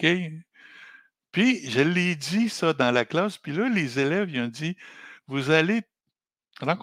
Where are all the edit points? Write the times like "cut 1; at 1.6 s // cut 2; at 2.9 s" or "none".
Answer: none